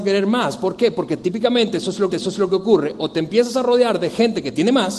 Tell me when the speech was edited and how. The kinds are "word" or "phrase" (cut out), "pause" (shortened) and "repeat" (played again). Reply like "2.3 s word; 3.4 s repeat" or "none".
2.1 s repeat